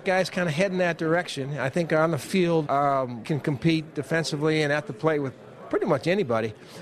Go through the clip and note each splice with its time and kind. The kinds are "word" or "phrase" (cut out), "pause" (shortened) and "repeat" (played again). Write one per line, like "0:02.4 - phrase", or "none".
0:02.7 - word
0:03.2 - word